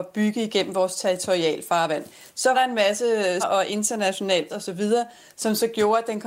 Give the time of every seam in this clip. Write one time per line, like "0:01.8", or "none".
0:02.5
0:03.4
0:04.5